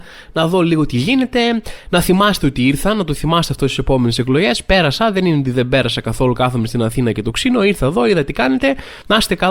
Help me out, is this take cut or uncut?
uncut